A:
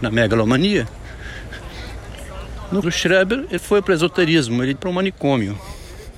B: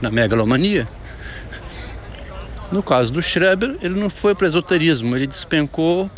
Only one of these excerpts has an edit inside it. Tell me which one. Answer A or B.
A